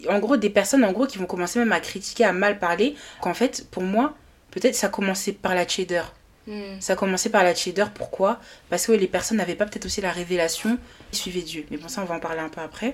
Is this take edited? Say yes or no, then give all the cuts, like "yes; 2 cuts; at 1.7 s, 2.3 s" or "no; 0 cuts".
yes; 2 cuts; at 3.2 s, 11.1 s